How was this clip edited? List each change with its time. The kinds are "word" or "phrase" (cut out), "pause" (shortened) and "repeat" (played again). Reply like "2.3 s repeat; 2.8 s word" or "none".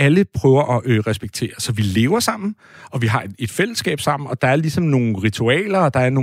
none